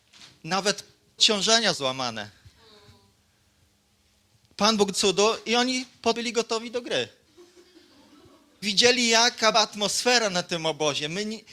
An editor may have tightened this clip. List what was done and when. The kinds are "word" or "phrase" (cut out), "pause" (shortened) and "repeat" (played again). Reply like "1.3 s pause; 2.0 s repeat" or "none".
1.2 s word; 1.7 s word; 4.9 s word; 6.1 s word; 8.6 s word; 9.5 s word